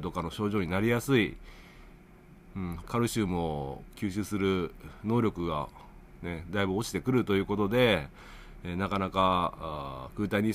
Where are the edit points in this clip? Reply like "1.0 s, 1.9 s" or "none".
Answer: 2.8 s